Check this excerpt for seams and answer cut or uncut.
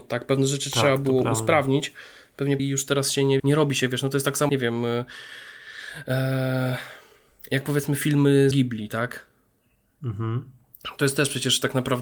cut